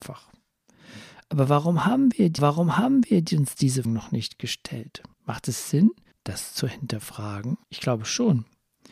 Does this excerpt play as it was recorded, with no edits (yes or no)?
no